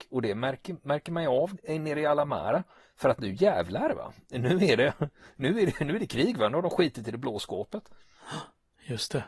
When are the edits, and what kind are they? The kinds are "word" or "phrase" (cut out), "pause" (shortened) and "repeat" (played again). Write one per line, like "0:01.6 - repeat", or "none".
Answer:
none